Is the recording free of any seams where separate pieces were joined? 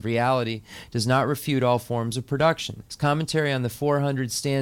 no; 1 cut; at 2.9 s

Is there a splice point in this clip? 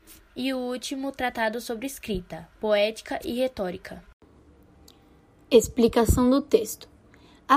no; 0 cuts

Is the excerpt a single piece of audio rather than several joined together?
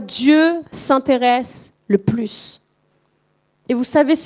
yes; 0 cuts

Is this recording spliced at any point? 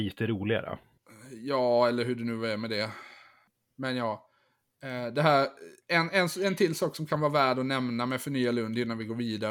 no; 0 cuts

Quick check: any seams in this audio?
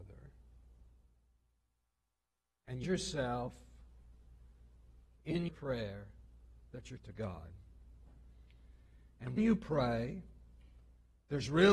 yes; 4 cuts; at 2.8 s, 5.5 s, 7.0 s, 9.4 s

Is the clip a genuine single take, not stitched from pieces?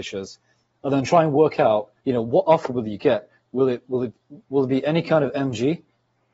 no; 1 cut; at 2.0 s

